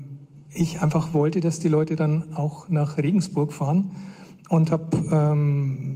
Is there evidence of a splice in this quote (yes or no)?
no